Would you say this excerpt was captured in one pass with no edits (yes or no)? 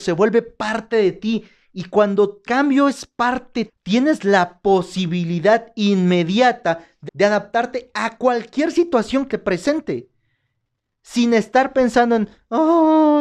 no